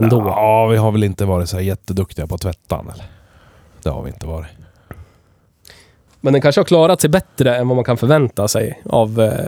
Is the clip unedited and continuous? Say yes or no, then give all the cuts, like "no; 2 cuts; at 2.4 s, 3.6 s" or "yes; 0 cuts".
yes; 0 cuts